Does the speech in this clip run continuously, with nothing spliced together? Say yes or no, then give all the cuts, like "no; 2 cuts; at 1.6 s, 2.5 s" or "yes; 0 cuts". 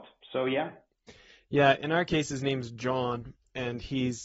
yes; 0 cuts